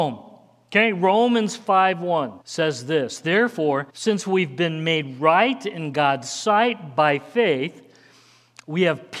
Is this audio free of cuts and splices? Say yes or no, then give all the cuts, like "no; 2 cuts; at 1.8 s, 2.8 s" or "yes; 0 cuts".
no; 2 cuts; at 2.4 s, 3.9 s